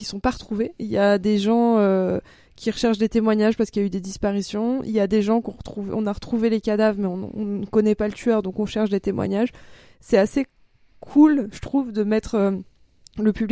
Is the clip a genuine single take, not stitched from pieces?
yes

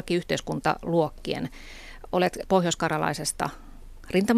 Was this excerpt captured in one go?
no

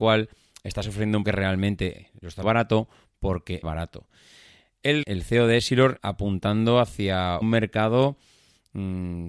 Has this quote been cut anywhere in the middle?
yes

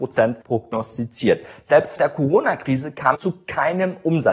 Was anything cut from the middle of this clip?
yes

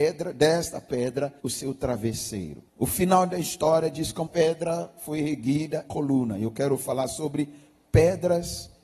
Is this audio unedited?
no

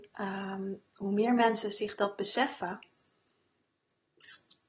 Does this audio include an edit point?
no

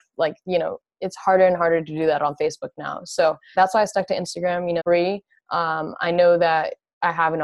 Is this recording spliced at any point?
yes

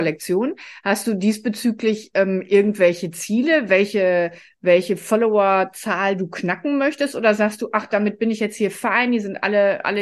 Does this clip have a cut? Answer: no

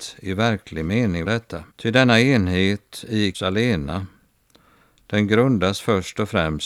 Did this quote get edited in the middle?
yes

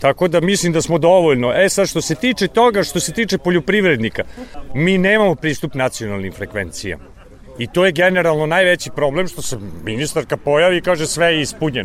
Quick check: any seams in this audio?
no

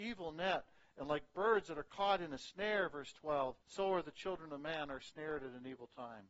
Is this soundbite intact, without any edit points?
no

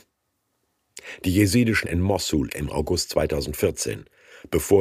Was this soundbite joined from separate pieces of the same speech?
yes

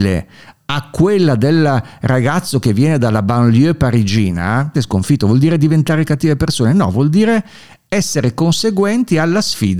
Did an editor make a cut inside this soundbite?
yes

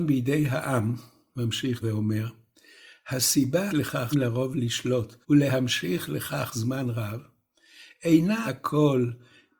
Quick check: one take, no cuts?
no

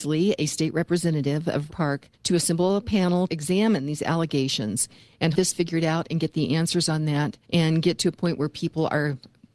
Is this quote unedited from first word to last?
no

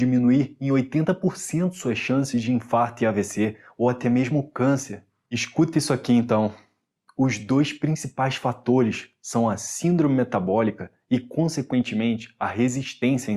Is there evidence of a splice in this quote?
no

